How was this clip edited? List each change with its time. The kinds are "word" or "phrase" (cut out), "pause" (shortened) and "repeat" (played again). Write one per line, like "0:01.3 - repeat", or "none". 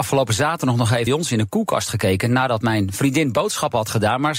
0:01.1 - word